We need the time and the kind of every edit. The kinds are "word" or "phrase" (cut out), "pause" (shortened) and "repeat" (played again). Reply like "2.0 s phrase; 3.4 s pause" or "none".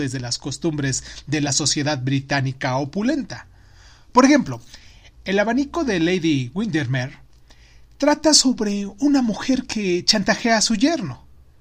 none